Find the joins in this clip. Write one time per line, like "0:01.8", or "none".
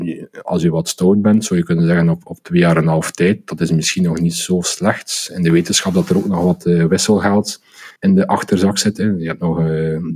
0:08.0